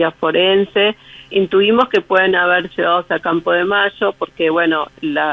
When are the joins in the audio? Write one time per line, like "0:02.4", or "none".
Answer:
0:01.3
0:02.7